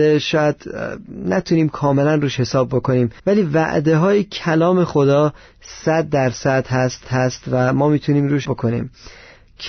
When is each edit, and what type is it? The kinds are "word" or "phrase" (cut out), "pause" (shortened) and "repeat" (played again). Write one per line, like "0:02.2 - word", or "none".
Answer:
0:03.2 - pause
0:07.0 - repeat
0:08.4 - word